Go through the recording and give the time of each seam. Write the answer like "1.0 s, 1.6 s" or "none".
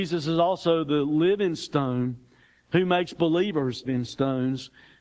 3.8 s